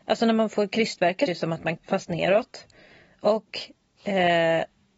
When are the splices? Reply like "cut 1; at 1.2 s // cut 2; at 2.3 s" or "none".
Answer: cut 1; at 1.3 s // cut 2; at 1.8 s

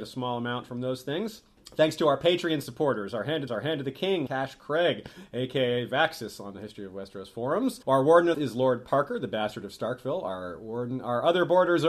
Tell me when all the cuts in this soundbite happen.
cut 1; at 1.6 s // cut 2; at 3.5 s // cut 3; at 4.3 s // cut 4; at 7.8 s // cut 5; at 8.3 s

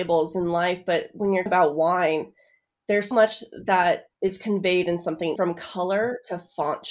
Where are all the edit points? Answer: cut 1; at 1.5 s // cut 2; at 3.1 s // cut 3; at 4.1 s // cut 4; at 5.4 s

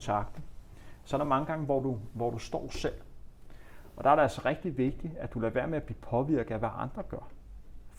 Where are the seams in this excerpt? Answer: none

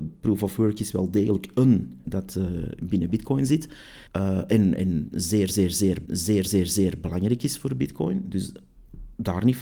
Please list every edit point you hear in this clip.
cut 1; at 2.0 s // cut 2; at 4.1 s // cut 3; at 6.1 s

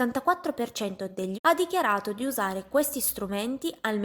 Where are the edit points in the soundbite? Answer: cut 1; at 1.3 s

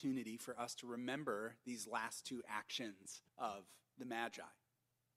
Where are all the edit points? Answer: cut 1; at 3.3 s

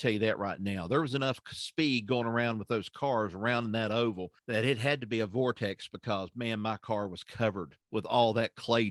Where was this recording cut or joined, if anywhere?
cut 1; at 4.4 s // cut 2; at 7.8 s

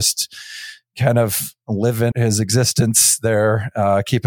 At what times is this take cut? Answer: cut 1; at 2.1 s

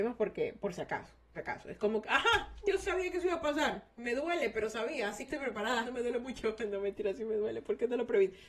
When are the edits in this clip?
cut 1; at 1.3 s // cut 2; at 2.0 s // cut 3; at 5.3 s // cut 4; at 5.8 s

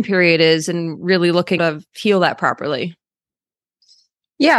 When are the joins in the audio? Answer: cut 1; at 1.6 s

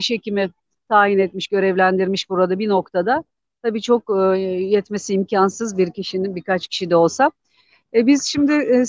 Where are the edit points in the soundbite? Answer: none

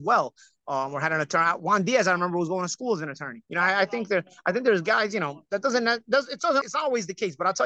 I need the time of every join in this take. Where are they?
cut 1; at 3.4 s // cut 2; at 6.6 s

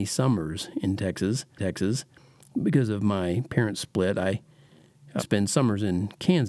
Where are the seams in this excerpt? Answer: cut 1; at 1.6 s // cut 2; at 5.2 s

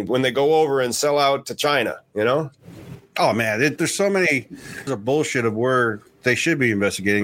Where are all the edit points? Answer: cut 1; at 3.8 s // cut 2; at 4.9 s

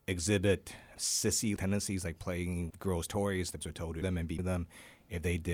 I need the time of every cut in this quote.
cut 1; at 1.0 s // cut 2; at 1.6 s // cut 3; at 2.7 s // cut 4; at 3.6 s // cut 5; at 4.0 s // cut 6; at 4.4 s

